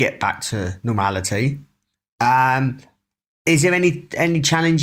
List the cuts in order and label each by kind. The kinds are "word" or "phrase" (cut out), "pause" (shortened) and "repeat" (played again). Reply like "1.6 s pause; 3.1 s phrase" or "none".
none